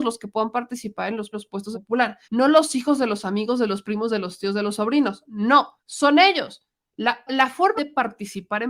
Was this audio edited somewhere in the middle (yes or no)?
yes